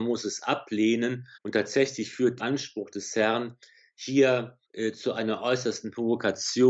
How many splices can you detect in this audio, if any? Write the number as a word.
three